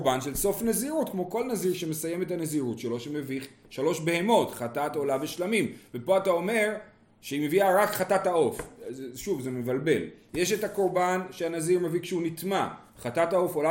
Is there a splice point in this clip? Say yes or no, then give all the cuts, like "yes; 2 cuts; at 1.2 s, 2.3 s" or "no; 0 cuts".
no; 0 cuts